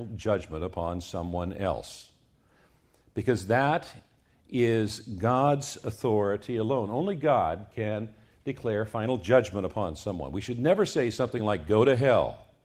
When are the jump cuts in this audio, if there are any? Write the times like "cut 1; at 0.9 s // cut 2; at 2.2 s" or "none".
none